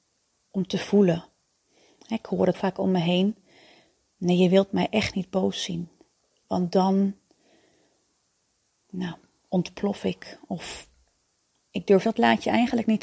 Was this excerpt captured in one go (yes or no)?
no